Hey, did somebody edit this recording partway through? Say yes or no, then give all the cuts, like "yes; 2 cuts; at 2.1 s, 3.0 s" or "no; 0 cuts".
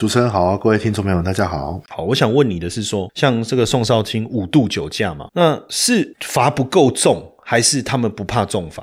yes; 1 cut; at 5.3 s